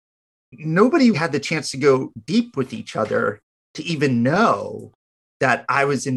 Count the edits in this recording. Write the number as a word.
one